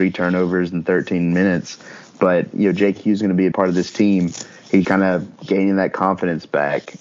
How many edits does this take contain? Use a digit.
2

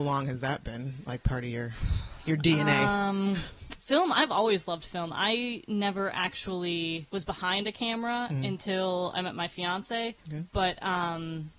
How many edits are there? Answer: 3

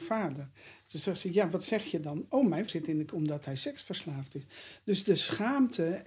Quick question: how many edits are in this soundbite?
2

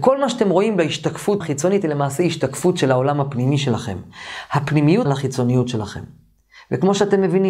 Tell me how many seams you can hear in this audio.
2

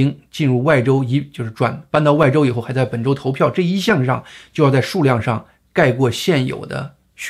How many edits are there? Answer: 0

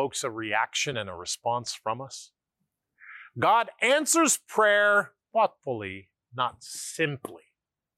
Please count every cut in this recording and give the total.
0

